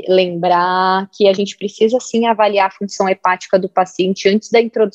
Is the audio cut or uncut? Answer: uncut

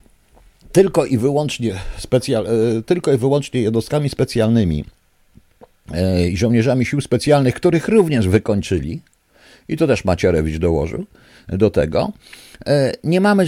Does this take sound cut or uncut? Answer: uncut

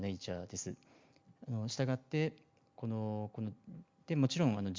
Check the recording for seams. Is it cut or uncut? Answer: uncut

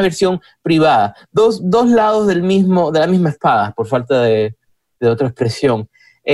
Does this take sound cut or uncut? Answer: uncut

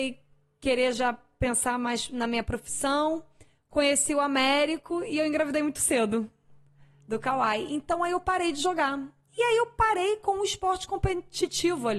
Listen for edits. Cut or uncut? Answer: uncut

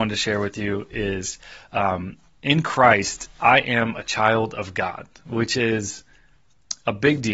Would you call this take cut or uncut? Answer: uncut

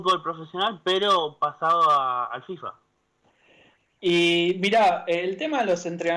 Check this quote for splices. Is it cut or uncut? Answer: uncut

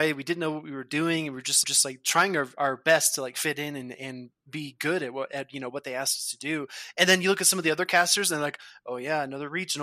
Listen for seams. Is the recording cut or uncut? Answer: cut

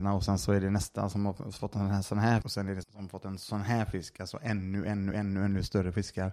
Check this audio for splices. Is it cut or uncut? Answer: cut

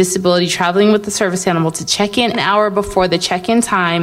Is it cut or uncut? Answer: cut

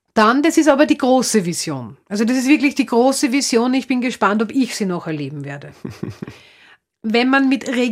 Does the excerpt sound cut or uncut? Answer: uncut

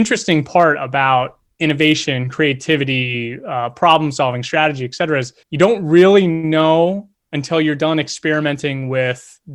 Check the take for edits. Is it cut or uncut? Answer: cut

